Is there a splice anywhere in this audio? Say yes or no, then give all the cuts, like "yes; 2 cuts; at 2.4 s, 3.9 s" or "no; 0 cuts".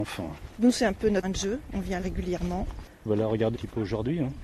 yes; 3 cuts; at 1.2 s, 2.0 s, 3.5 s